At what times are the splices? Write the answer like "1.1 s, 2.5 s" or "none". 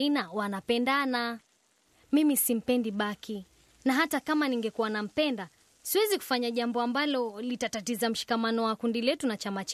none